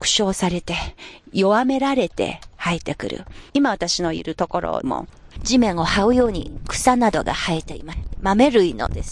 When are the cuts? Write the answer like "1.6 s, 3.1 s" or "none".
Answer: 3.5 s